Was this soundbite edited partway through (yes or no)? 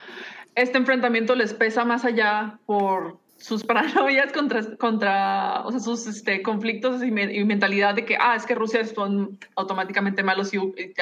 yes